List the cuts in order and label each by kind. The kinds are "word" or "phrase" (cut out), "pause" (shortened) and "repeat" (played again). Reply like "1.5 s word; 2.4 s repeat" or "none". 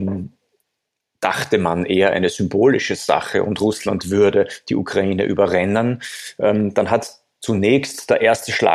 none